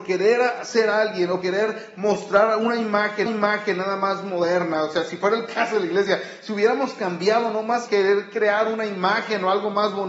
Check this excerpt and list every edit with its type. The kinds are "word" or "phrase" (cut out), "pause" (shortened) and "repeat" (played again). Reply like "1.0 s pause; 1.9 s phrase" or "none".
1.4 s word; 3.3 s repeat; 7.9 s word